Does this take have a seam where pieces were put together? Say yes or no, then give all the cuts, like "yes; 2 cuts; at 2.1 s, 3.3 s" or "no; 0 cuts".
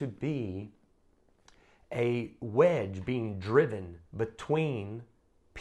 yes; 1 cut; at 4.1 s